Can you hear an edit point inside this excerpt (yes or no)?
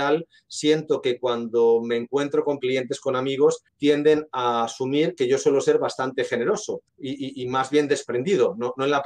yes